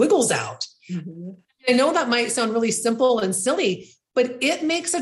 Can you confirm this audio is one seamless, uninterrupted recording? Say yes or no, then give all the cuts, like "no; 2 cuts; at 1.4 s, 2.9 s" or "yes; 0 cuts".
yes; 0 cuts